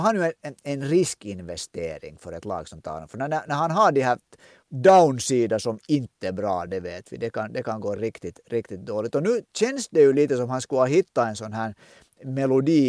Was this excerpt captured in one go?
yes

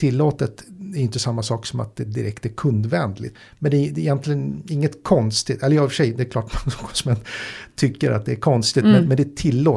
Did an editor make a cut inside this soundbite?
no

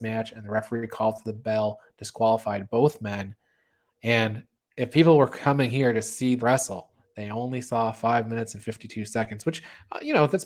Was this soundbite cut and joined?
yes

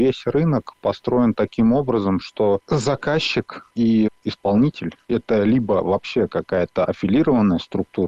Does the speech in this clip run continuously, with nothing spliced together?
yes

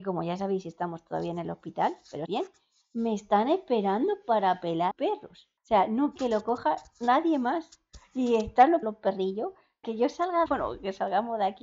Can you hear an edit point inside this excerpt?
yes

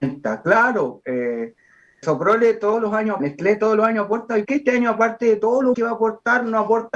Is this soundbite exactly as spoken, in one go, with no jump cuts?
no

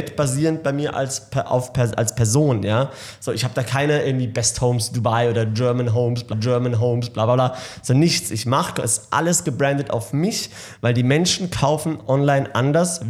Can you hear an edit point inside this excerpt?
yes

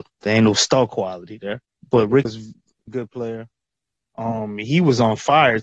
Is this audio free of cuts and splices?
no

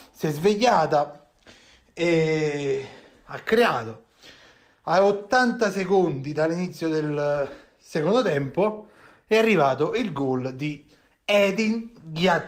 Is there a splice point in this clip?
no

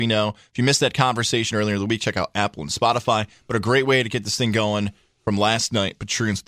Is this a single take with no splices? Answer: yes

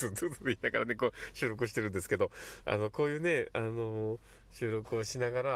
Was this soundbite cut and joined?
yes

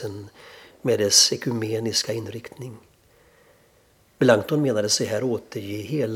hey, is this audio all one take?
yes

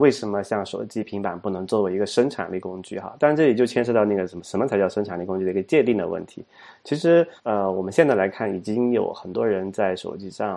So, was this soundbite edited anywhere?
yes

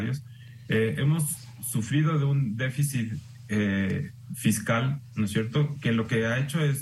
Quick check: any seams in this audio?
no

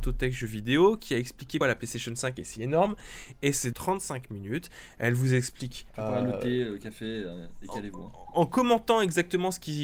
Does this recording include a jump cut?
yes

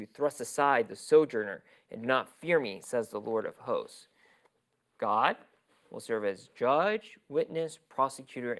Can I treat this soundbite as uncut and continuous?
yes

